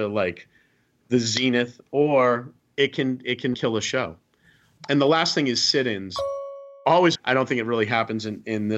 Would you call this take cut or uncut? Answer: cut